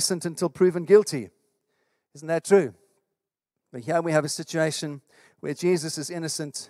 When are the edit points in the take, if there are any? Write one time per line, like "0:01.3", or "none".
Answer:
none